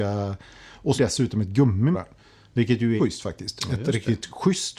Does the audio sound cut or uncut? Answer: cut